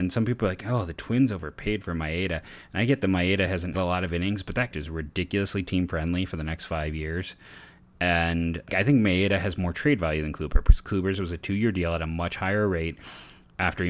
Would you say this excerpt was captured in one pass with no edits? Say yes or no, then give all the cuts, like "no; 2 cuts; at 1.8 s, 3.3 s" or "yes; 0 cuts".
no; 3 cuts; at 3.7 s, 4.7 s, 8.7 s